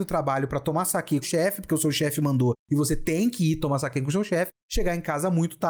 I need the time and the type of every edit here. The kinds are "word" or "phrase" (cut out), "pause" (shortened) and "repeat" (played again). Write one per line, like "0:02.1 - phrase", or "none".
0:01.2 - phrase